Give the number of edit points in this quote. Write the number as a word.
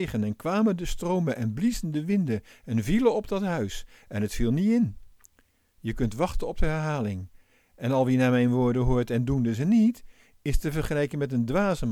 zero